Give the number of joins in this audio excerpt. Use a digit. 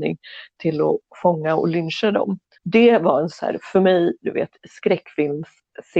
1